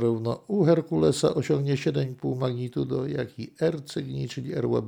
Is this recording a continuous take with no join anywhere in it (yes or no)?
yes